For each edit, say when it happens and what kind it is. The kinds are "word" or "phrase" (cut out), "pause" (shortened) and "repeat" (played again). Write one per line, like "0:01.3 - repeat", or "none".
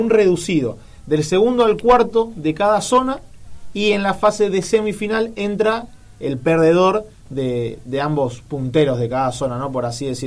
none